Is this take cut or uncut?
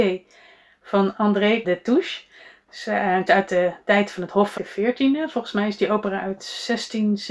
cut